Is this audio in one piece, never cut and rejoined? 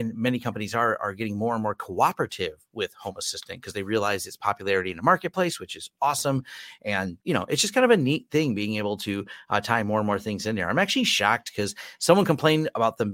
no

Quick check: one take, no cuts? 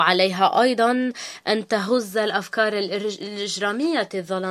yes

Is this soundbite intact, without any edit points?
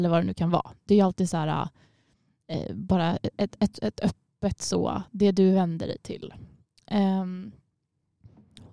yes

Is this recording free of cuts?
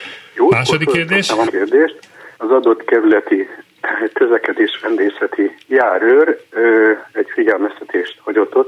no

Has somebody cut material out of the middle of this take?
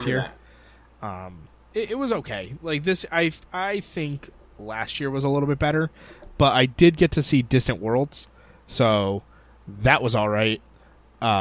no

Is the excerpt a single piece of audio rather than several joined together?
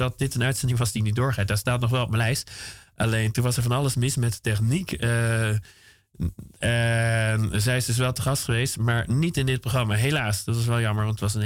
yes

